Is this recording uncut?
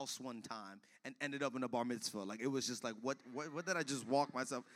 yes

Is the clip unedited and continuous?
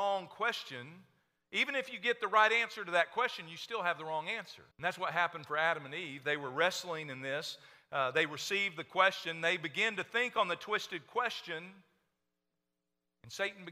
no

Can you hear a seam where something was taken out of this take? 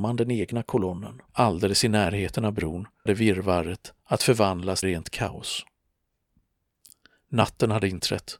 yes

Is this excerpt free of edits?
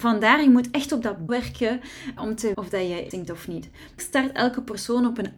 no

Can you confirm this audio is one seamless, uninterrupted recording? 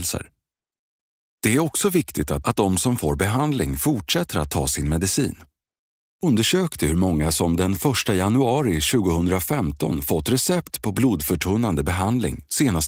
no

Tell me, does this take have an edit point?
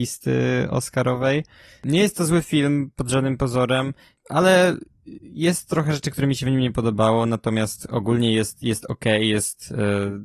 no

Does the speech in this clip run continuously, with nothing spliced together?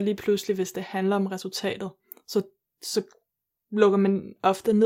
yes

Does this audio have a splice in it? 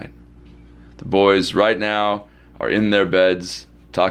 no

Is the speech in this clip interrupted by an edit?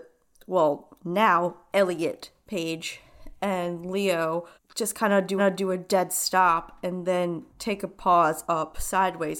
yes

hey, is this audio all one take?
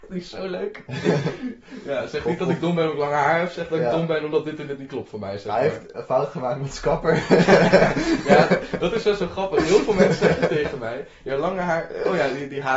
yes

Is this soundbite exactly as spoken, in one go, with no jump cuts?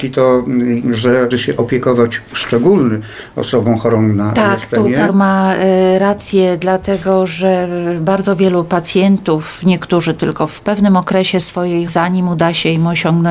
no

